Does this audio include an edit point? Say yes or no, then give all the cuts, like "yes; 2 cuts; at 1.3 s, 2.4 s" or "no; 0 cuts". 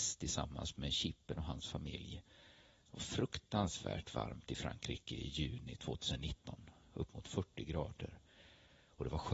no; 0 cuts